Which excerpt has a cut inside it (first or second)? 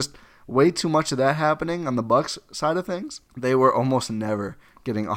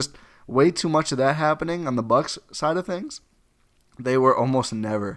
first